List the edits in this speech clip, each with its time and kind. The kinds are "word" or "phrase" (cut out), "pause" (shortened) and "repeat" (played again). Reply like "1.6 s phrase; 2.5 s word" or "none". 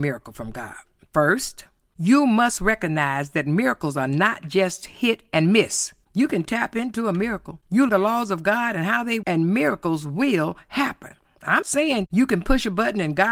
7.9 s word; 9.2 s word; 11.6 s word